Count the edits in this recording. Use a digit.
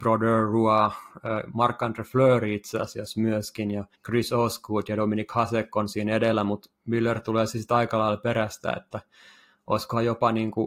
1